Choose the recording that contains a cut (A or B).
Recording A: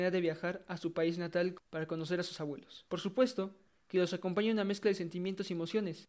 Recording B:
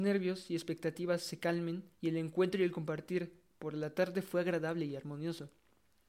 B